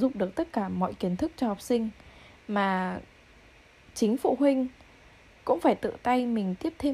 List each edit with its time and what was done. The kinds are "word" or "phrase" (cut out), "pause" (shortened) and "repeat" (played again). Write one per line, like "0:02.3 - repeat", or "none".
none